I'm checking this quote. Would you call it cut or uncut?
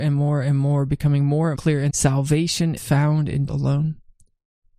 cut